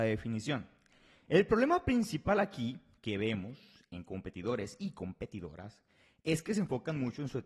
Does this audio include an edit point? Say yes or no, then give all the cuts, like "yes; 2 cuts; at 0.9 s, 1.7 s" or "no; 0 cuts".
no; 0 cuts